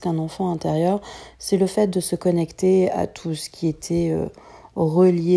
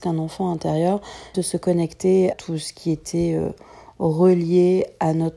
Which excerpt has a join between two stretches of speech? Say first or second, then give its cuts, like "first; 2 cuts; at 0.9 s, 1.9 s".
second; 2 cuts; at 1.3 s, 2.3 s